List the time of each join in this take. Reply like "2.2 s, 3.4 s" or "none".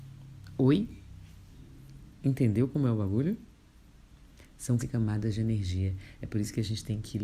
4.8 s